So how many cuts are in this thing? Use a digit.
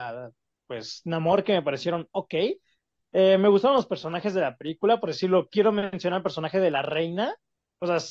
0